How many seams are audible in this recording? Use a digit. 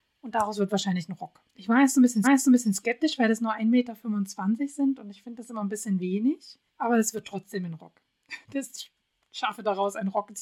4